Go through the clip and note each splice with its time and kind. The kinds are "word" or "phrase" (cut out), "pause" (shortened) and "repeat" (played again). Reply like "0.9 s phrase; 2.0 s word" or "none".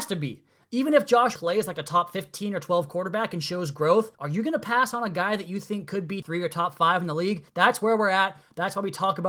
1.3 s word; 4.1 s pause; 6.2 s word; 7.5 s pause